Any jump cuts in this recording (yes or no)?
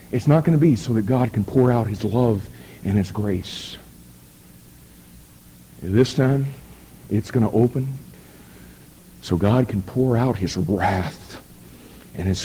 no